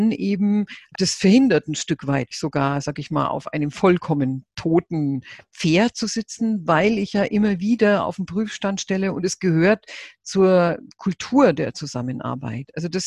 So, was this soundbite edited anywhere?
yes; 2 cuts; at 0.9 s, 2.3 s

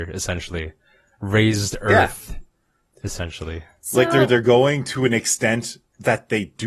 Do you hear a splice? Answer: no; 0 cuts

